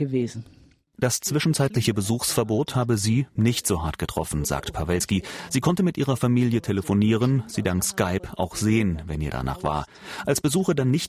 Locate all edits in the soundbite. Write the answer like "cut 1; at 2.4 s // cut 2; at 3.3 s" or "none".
none

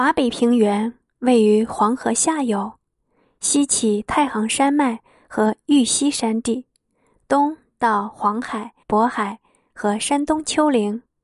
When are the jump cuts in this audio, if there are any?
cut 1; at 8.8 s

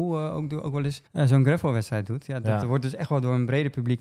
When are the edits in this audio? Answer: cut 1; at 1.1 s

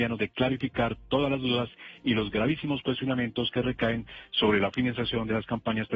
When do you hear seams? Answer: none

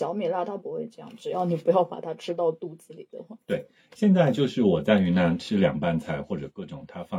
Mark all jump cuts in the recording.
cut 1; at 3.4 s

